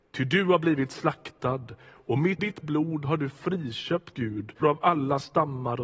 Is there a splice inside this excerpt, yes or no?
yes